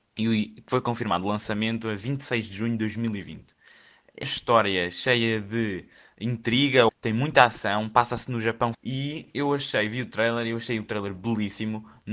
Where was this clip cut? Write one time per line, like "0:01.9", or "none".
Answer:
0:04.2
0:06.9
0:08.7